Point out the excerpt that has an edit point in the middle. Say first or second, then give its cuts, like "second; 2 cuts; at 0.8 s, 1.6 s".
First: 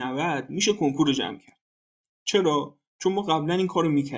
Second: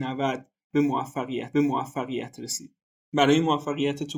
second; 1 cut; at 1.5 s